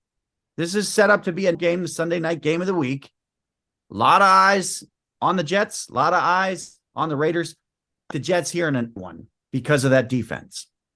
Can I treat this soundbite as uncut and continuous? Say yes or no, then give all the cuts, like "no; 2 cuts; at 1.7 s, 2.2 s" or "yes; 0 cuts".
no; 3 cuts; at 1.5 s, 8.1 s, 9.0 s